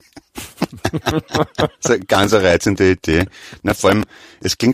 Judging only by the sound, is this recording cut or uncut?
cut